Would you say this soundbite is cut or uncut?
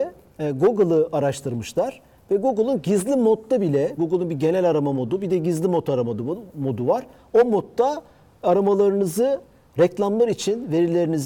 cut